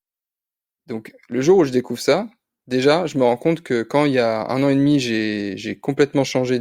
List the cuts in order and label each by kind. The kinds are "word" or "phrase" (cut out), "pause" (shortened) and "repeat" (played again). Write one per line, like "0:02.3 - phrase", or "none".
none